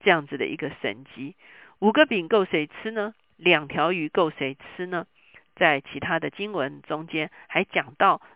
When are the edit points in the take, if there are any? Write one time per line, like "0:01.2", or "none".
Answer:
none